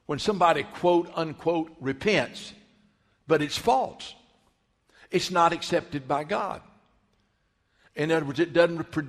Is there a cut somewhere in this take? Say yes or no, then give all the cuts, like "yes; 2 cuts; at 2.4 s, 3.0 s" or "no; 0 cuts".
no; 0 cuts